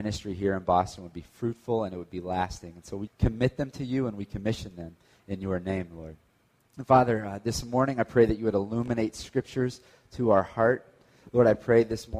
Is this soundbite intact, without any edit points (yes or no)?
no